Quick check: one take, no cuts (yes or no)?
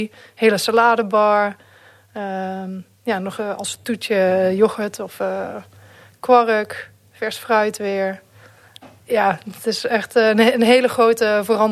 yes